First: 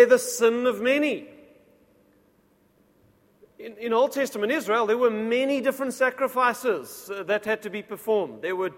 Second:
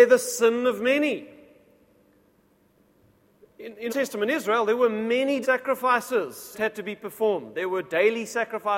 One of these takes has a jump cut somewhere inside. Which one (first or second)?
second